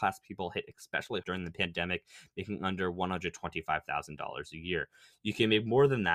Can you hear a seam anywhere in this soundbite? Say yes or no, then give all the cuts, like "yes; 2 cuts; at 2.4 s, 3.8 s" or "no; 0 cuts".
yes; 1 cut; at 1.2 s